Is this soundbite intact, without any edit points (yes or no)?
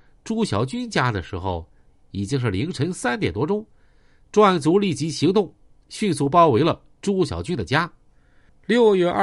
yes